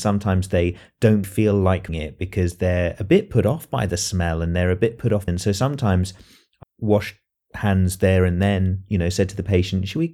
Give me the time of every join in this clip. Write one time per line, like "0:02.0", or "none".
0:01.2
0:01.9
0:05.3
0:06.6